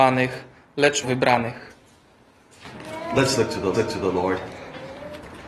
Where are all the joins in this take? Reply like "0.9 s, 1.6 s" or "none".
1.0 s, 3.7 s